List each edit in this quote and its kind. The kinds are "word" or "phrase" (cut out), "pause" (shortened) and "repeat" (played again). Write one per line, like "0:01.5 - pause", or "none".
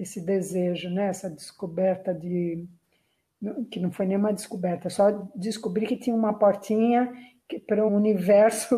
0:07.9 - word